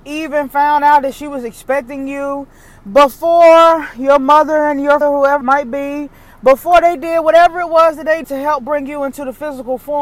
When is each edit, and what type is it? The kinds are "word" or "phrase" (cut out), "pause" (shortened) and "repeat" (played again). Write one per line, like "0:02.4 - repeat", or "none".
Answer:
0:05.0 - word
0:05.4 - word
0:08.2 - word